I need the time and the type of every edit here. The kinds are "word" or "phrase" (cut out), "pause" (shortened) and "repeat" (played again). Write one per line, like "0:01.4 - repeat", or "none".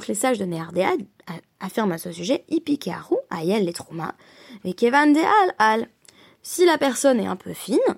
none